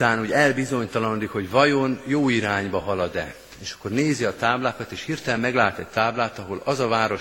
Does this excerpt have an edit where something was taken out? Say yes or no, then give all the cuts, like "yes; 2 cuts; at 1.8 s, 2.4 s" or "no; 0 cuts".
no; 0 cuts